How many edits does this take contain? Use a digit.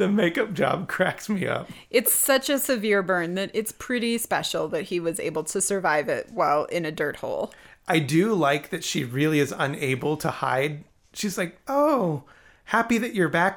0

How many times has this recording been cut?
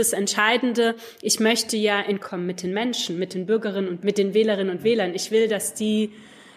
2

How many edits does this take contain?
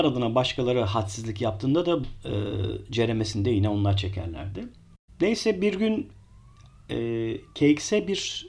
1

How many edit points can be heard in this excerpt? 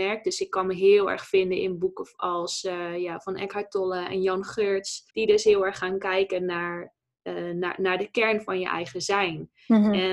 1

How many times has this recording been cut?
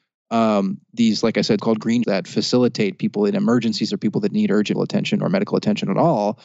4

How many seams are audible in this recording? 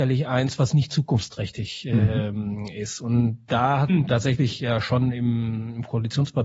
1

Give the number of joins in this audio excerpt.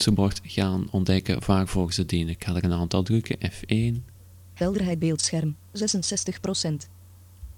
1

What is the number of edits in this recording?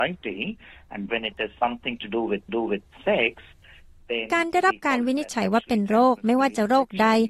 2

